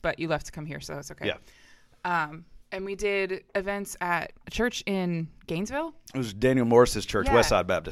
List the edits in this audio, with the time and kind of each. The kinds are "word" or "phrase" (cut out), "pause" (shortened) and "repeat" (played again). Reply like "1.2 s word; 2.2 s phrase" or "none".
2.6 s pause; 3.5 s pause; 4.4 s word